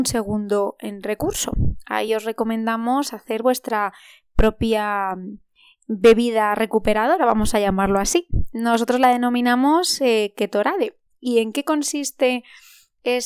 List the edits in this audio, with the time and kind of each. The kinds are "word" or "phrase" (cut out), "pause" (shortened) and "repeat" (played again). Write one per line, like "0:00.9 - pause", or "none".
none